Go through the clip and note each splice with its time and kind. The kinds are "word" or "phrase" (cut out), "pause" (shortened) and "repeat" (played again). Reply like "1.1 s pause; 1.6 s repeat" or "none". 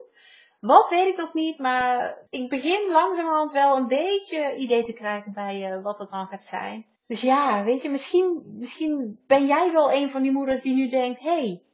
2.3 s pause; 7.0 s pause